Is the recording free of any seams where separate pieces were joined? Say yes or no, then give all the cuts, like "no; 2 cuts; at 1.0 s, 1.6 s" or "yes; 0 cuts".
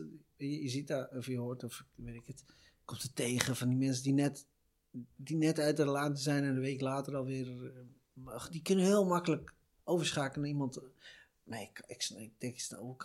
yes; 0 cuts